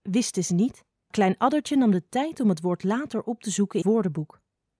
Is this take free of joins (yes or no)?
no